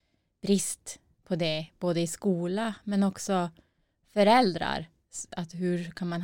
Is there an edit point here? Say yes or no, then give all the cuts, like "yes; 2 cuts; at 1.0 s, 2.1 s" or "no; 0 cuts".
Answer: no; 0 cuts